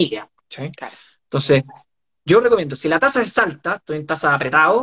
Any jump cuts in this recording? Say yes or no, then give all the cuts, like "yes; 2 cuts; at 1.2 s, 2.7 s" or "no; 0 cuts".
no; 0 cuts